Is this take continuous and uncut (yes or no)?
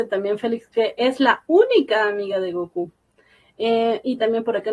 yes